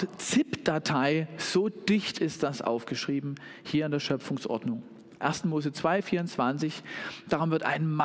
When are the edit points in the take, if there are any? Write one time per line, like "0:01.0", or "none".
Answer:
0:05.2